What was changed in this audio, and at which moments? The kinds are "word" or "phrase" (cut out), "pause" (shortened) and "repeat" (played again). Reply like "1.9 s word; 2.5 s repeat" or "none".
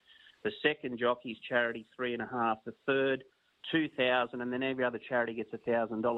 none